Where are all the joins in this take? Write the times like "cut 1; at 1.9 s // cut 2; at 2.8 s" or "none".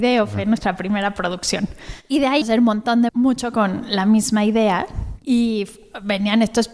cut 1; at 2.4 s // cut 2; at 3.1 s

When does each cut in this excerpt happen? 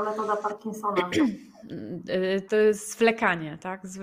cut 1; at 2.5 s

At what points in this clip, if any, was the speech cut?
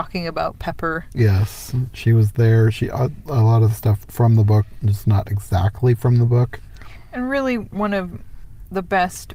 cut 1; at 4.1 s

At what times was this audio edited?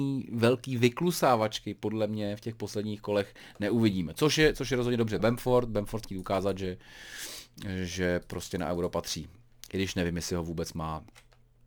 cut 1; at 5.2 s // cut 2; at 6.0 s

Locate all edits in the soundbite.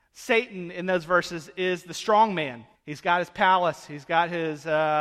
cut 1; at 2.7 s

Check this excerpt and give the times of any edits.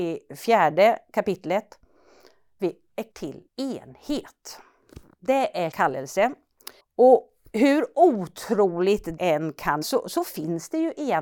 cut 1; at 2.6 s // cut 2; at 3.1 s // cut 3; at 3.5 s // cut 4; at 5.7 s // cut 5; at 6.8 s // cut 6; at 9.2 s // cut 7; at 9.8 s

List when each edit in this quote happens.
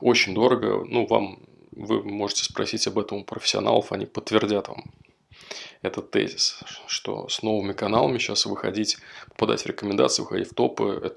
none

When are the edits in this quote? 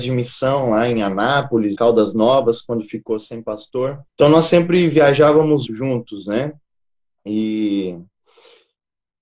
cut 1; at 1.8 s // cut 2; at 4.1 s // cut 3; at 5.7 s

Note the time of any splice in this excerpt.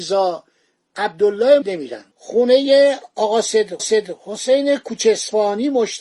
cut 1; at 1.6 s // cut 2; at 2.1 s // cut 3; at 3.8 s

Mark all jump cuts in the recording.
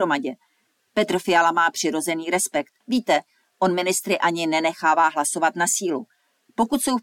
cut 1; at 2.8 s

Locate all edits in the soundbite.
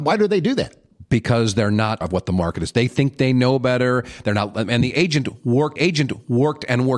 cut 1; at 2.0 s // cut 2; at 5.8 s

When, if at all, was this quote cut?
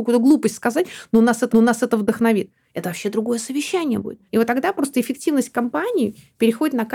cut 1; at 1.5 s // cut 2; at 4.3 s

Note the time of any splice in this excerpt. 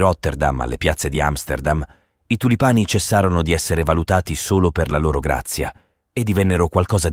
none

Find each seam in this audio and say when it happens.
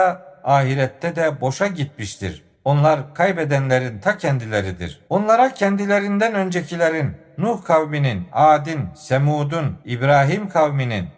cut 1; at 2.5 s // cut 2; at 5.1 s // cut 3; at 9.8 s

